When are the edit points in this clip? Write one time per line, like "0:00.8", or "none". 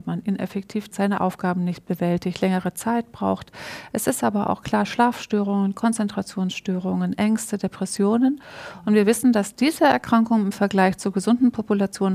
0:00.9